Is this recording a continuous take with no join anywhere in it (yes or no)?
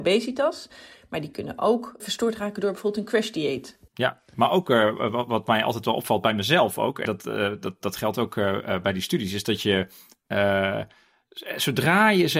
no